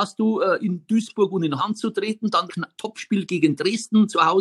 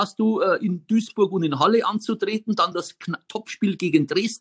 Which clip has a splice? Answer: first; 2 cuts; at 1.6 s, 2.5 s

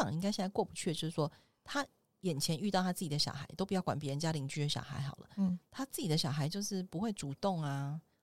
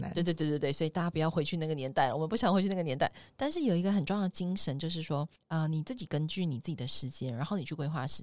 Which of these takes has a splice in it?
second; 1 cut; at 5.4 s

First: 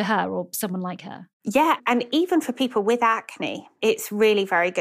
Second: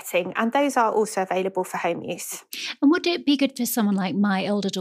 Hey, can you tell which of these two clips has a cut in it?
first; 1 cut; at 1.3 s

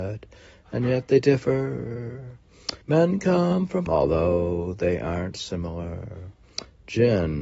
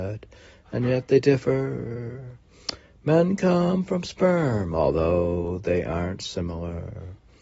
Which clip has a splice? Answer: first; 2 cuts; at 2.8 s, 3.9 s

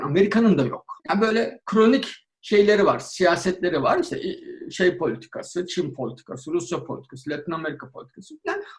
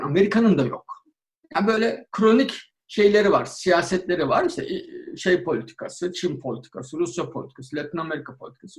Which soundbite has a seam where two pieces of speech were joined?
first; 1 cut; at 1.0 s

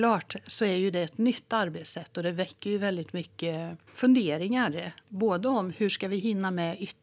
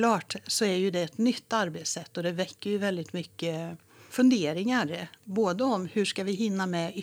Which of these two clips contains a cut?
first; 1 cut; at 3.9 s

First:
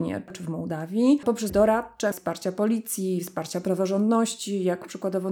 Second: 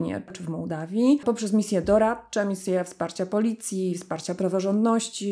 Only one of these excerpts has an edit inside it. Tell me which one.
first; 2 cuts; at 1.5 s, 2.1 s

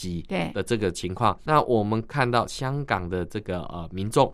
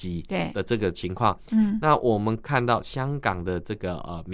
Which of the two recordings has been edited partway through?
first; 1 cut; at 1.5 s

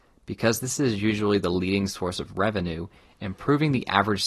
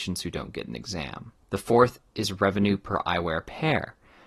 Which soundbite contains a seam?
second; 1 cut; at 1.4 s

